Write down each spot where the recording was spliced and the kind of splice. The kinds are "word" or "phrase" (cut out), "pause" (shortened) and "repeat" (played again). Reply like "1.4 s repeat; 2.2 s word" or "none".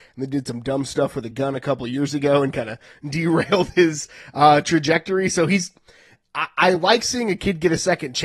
none